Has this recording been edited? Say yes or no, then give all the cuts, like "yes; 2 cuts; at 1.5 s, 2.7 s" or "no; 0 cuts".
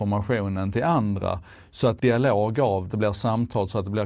yes; 2 cuts; at 2.0 s, 2.9 s